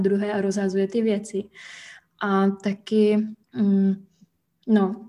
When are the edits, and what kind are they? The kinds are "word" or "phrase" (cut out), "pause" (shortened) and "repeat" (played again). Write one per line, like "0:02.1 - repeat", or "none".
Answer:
0:03.4 - pause